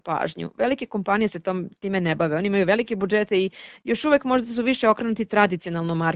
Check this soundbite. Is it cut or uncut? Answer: uncut